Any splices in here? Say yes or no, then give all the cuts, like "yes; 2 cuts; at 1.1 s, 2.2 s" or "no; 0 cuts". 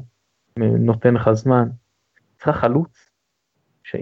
no; 0 cuts